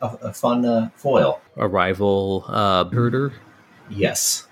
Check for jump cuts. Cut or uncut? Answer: cut